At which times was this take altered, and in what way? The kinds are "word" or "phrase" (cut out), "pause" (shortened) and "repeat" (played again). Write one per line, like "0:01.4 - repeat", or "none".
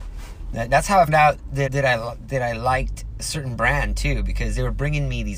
0:01.1 - word
0:01.7 - word